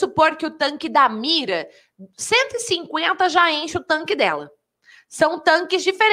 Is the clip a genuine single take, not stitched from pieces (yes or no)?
yes